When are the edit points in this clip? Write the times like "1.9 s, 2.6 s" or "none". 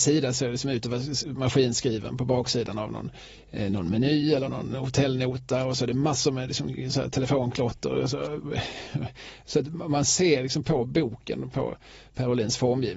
none

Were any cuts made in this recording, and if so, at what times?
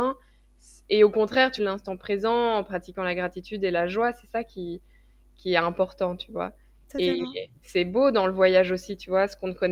1.6 s

